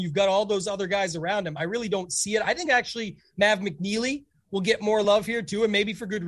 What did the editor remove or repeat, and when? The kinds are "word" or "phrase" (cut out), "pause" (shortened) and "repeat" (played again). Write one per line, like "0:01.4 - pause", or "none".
none